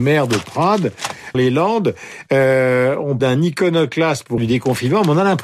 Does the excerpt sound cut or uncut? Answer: cut